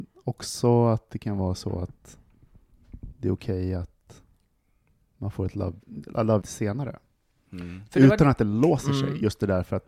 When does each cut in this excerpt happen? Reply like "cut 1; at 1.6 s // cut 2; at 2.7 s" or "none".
cut 1; at 6.4 s